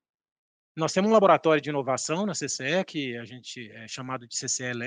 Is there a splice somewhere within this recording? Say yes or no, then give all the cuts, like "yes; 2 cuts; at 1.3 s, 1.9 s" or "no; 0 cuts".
no; 0 cuts